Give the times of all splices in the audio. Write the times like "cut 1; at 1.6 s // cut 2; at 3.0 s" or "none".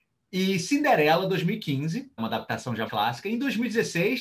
cut 1; at 2.2 s // cut 2; at 2.9 s